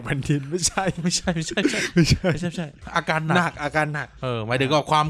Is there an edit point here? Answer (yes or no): yes